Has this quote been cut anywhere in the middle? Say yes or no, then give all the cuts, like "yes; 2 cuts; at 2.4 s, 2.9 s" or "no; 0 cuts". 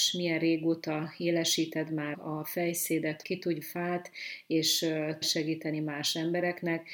yes; 4 cuts; at 2.1 s, 3.2 s, 3.6 s, 5.2 s